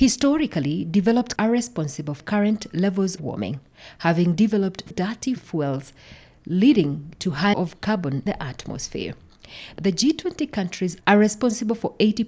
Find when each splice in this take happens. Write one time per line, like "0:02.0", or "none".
0:01.4
0:02.2
0:03.2
0:04.9
0:05.4
0:07.5
0:08.3
0:11.0